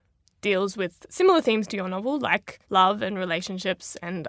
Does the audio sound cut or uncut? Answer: cut